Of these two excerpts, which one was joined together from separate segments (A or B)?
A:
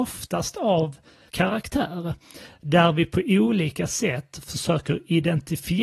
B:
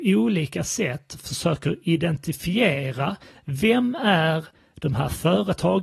A